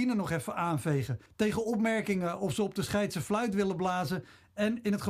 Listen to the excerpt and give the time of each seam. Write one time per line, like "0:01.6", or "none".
0:01.3